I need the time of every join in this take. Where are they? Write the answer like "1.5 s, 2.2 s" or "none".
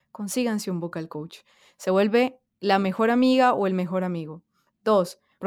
none